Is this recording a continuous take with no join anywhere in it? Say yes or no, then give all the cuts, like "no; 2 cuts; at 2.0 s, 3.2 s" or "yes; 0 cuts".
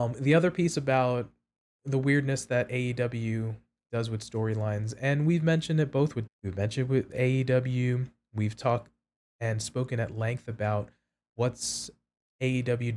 no; 1 cut; at 6.3 s